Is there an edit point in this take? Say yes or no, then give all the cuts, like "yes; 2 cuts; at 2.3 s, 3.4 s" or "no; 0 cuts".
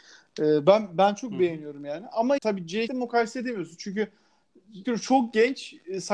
yes; 3 cuts; at 2.4 s, 2.9 s, 4.8 s